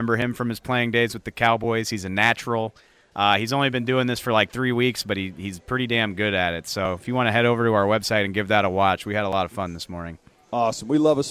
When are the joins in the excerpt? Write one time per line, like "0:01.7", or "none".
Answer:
none